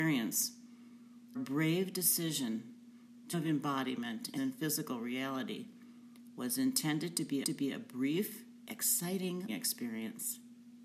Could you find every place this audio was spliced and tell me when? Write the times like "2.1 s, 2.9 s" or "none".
1.3 s, 3.3 s, 4.4 s, 7.4 s, 9.5 s